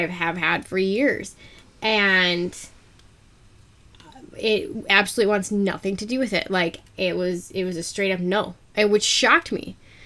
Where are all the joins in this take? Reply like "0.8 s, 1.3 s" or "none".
8.6 s